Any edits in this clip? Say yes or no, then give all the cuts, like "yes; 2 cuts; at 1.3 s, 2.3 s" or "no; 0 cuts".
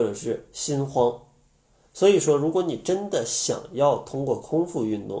no; 0 cuts